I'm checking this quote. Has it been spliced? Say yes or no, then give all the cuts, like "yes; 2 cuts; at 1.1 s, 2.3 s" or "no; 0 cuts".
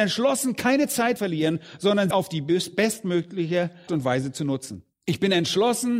yes; 4 cuts; at 1.2 s, 2.1 s, 3.9 s, 4.9 s